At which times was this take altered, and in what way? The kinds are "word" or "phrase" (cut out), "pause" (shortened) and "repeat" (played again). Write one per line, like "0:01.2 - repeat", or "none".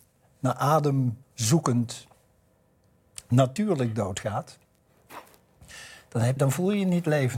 0:01.2 - pause
0:06.4 - word